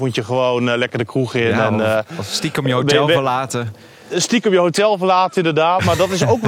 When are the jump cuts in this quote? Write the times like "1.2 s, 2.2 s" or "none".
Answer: none